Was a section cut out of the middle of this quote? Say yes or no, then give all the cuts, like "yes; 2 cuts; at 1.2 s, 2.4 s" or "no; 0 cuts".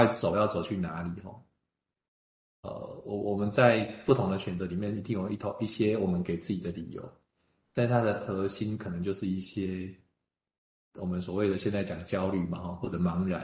no; 0 cuts